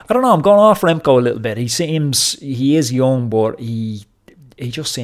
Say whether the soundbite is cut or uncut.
uncut